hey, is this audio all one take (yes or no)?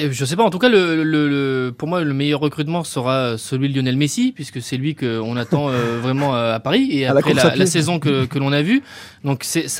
yes